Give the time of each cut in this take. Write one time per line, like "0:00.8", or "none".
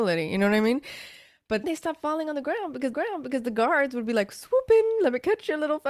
0:01.6
0:02.9